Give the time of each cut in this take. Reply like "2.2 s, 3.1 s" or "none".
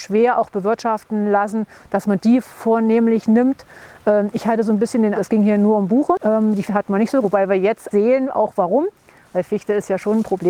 5.1 s, 6.7 s, 7.2 s, 7.9 s